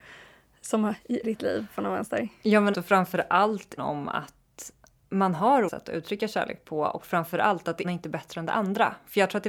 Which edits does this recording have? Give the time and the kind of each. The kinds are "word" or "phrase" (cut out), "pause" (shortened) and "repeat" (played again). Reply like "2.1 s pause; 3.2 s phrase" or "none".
1.2 s word; 2.7 s word; 3.8 s word; 5.7 s word; 7.8 s word